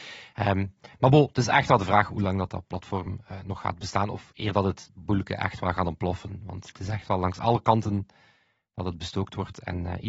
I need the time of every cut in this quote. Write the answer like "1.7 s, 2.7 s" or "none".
none